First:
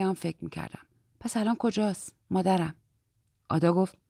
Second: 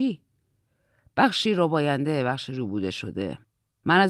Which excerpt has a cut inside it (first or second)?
first